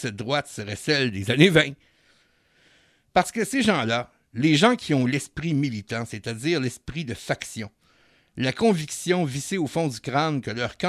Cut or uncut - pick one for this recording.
uncut